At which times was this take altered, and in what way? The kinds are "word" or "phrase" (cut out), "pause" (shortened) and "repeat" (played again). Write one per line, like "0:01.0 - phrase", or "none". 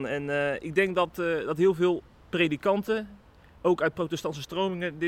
none